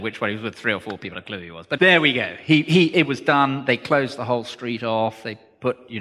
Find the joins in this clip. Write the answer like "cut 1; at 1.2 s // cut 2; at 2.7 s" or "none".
cut 1; at 1.1 s // cut 2; at 1.8 s // cut 3; at 2.9 s